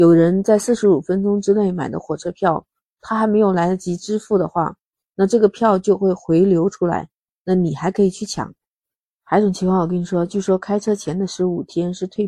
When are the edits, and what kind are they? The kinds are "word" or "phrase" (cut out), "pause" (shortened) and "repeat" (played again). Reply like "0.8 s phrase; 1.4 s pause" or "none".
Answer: none